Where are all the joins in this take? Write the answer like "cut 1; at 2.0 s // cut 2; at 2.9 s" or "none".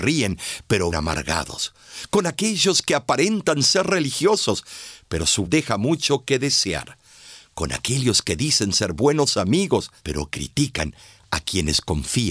cut 1; at 0.9 s // cut 2; at 5.4 s // cut 3; at 10.0 s